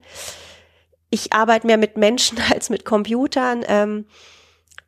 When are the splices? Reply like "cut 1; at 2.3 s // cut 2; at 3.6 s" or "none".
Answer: none